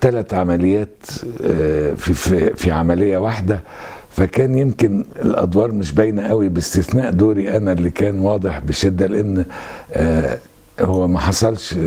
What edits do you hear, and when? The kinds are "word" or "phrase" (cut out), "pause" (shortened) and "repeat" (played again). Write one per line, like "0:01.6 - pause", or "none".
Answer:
none